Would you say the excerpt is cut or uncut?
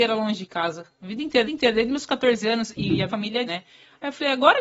cut